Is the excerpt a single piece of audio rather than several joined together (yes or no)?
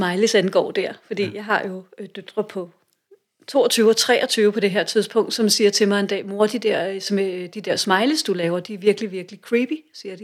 yes